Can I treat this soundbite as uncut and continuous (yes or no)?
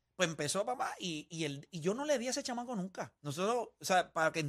no